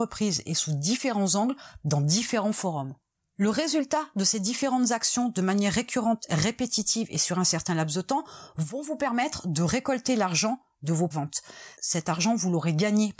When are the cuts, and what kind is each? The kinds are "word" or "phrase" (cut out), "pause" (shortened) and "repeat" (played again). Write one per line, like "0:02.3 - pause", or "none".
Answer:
0:11.1 - word

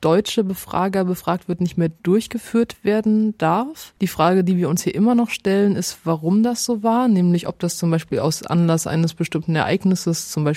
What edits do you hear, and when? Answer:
0:04.0 - pause

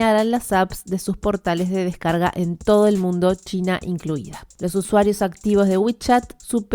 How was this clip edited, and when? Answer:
none

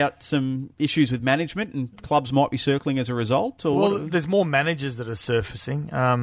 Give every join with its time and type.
none

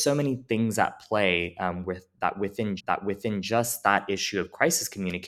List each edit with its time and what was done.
0:02.8 - repeat

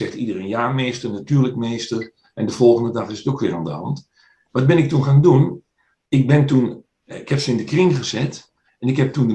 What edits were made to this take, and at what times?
none

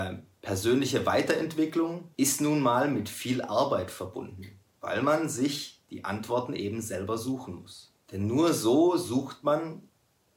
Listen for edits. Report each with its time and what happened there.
0:02.1 - pause
0:04.7 - pause
0:08.0 - pause

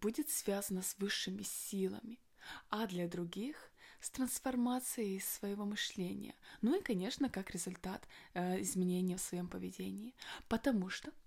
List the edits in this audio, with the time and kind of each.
none

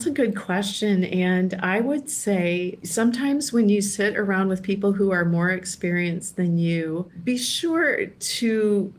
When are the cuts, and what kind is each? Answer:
none

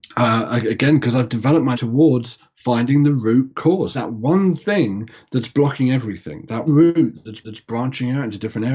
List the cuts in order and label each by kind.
0:01.7 - word
0:03.9 - word
0:06.7 - word
0:07.4 - repeat

